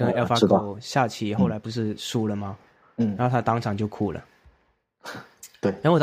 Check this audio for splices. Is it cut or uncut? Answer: uncut